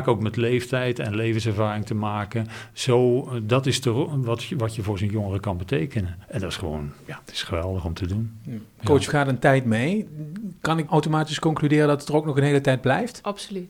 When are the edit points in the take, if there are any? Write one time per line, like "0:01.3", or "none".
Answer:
0:06.2
0:07.3
0:09.1
0:10.9